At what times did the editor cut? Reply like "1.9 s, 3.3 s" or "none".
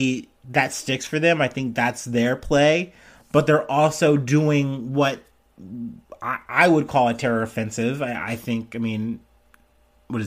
none